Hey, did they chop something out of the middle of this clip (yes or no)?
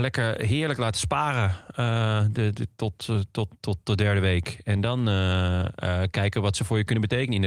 no